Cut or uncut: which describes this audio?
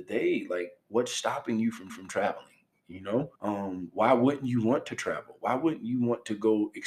cut